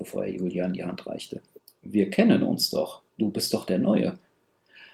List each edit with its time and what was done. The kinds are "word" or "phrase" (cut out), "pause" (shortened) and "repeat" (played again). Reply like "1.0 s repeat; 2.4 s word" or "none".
1.6 s pause; 3.1 s pause